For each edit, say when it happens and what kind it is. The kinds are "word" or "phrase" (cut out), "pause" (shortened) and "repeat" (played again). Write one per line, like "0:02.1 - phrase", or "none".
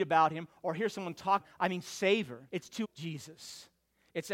0:01.4 - word
0:02.5 - pause
0:02.8 - word